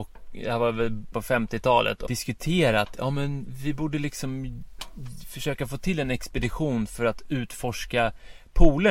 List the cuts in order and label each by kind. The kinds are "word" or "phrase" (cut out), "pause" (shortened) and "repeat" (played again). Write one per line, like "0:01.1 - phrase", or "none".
0:01.1 - word
0:02.1 - phrase